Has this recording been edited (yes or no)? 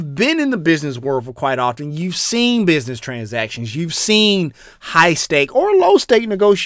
no